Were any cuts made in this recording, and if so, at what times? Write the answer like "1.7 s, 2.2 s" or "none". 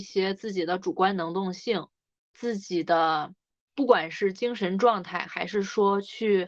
none

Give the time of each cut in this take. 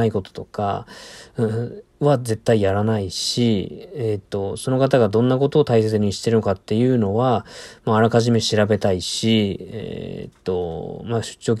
1.9 s

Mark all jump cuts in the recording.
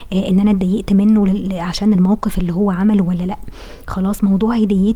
none

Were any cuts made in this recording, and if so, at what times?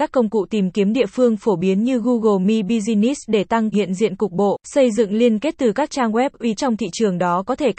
3.7 s, 4.6 s, 6.6 s

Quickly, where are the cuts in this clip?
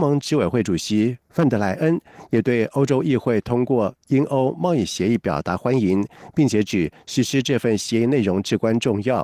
1.2 s

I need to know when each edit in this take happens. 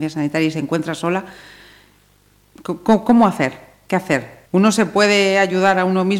4.5 s

